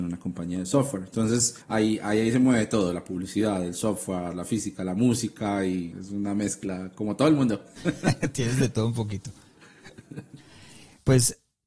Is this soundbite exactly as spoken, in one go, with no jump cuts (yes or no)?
no